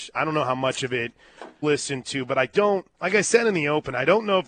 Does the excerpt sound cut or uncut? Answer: cut